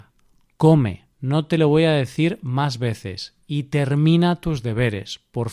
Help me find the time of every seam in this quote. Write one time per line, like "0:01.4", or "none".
0:01.1